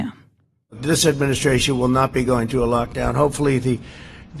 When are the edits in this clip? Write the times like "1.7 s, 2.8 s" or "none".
none